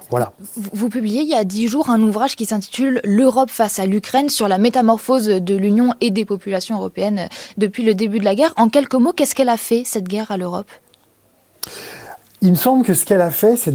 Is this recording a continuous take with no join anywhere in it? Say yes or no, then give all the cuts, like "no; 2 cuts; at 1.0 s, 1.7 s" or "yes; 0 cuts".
yes; 0 cuts